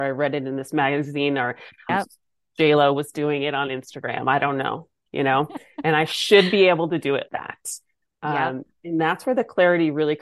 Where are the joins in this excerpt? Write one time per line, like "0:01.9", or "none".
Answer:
0:01.9
0:07.3